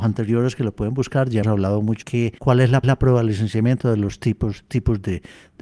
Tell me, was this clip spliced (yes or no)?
yes